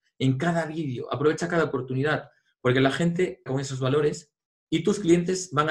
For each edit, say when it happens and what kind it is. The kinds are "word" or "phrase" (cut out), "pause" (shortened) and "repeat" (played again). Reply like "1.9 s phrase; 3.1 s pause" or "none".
3.5 s word